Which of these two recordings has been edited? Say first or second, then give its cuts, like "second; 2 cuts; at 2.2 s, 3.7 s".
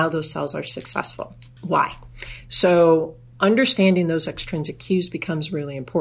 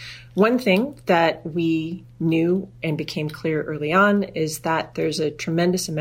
first; 2 cuts; at 1.5 s, 3.3 s